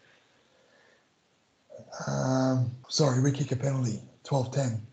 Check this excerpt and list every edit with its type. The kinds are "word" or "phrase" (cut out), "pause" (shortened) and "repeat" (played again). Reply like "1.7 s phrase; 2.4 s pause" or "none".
2.8 s pause